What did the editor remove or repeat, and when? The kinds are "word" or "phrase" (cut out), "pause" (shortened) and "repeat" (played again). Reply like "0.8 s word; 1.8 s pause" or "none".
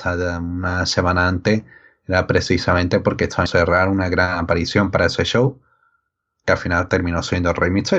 3.5 s word